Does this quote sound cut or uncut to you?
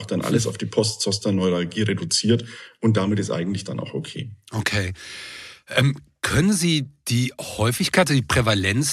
uncut